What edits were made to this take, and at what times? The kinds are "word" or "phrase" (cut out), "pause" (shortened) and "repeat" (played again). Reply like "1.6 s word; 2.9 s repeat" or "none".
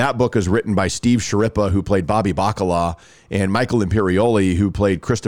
none